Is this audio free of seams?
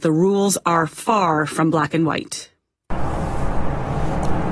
yes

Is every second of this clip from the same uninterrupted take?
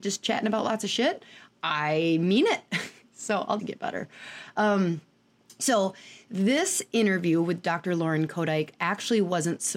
no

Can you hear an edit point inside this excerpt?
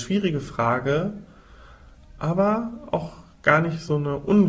no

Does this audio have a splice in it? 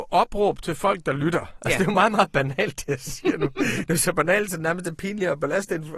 no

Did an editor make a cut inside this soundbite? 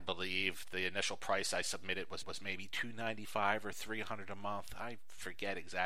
yes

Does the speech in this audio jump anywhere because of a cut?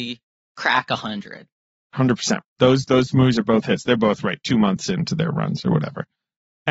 no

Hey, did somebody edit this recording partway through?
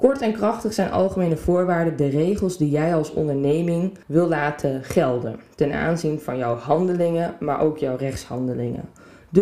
yes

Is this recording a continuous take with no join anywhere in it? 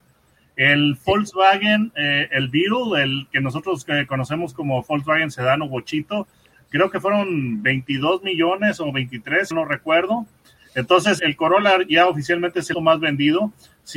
no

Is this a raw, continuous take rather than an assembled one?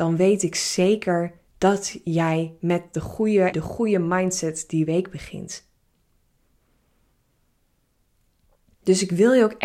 no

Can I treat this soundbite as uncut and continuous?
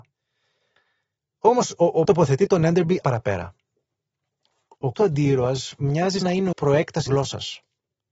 no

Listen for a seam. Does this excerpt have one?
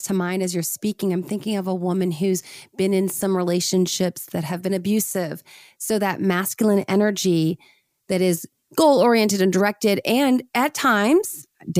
no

